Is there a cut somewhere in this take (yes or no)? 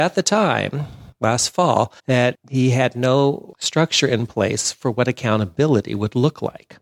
yes